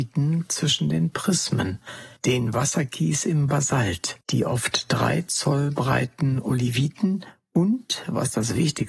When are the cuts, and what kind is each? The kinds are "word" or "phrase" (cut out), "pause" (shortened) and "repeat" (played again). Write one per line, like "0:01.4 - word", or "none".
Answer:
0:02.2 - pause
0:04.2 - pause